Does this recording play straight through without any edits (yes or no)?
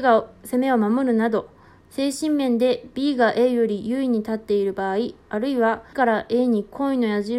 no